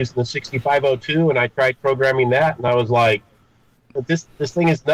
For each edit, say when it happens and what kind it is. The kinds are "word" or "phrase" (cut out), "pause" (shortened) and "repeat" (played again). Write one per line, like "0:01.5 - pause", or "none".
none